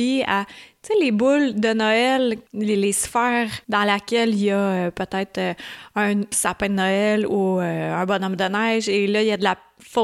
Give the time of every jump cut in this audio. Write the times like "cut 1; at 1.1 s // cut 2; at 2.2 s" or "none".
cut 1; at 2.5 s // cut 2; at 3.6 s